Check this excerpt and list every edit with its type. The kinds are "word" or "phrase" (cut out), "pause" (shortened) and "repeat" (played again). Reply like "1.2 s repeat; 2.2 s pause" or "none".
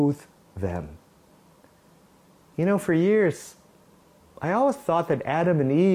none